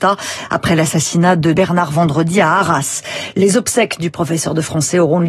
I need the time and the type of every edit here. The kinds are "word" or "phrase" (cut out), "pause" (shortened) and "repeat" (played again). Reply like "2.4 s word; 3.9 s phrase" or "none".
1.6 s word